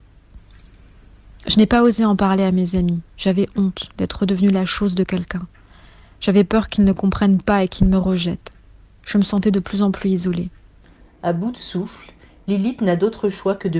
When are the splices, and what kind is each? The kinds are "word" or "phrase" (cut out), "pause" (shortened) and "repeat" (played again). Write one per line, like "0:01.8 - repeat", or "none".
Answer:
none